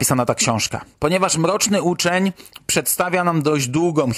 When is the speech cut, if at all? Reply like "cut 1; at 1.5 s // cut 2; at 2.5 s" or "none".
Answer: cut 1; at 0.9 s